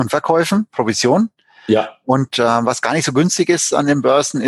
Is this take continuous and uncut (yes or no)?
yes